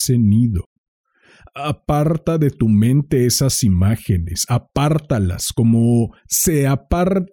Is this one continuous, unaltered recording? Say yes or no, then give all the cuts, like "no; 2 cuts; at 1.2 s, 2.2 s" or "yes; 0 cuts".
yes; 0 cuts